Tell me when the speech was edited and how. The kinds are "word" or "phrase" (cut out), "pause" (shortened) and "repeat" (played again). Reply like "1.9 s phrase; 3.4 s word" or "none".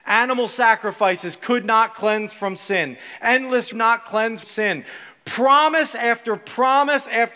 3.7 s phrase; 4.4 s word